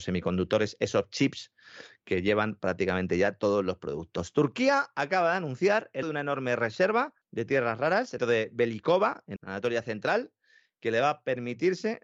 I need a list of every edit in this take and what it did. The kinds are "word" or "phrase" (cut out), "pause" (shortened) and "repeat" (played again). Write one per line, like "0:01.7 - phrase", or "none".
0:06.0 - word
0:07.2 - pause
0:08.2 - phrase
0:09.4 - word